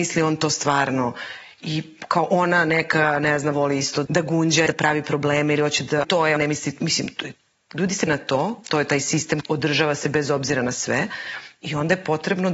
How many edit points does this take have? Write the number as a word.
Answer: seven